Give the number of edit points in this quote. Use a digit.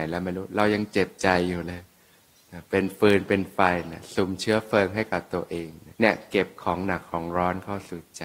1